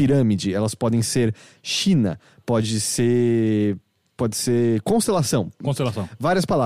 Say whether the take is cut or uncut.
uncut